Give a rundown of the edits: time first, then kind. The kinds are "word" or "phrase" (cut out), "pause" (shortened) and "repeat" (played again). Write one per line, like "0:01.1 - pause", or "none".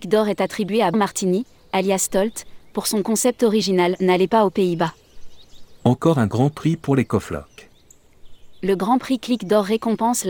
0:00.9 - word

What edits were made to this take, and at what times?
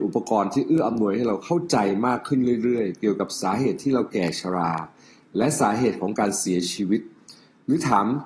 none

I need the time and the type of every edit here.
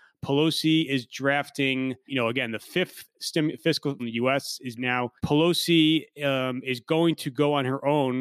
0:02.1 - word
0:04.0 - phrase
0:04.8 - phrase
0:05.2 - pause

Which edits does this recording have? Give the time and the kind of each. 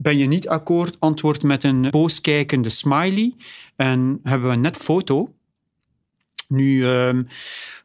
0:01.9 - word
0:04.7 - phrase

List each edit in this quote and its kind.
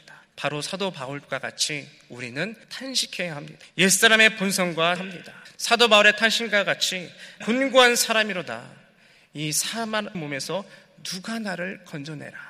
0:02.6 - pause
0:05.0 - word
0:07.4 - phrase
0:10.1 - phrase

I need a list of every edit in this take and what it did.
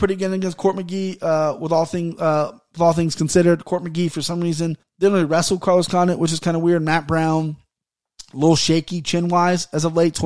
0:04.8 - pause

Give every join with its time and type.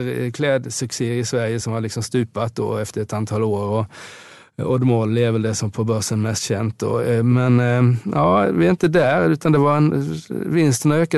none

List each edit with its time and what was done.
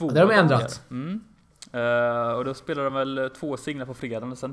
none

